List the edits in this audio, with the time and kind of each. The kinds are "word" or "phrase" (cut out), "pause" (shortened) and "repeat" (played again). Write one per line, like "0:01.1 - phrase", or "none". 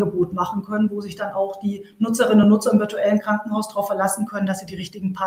none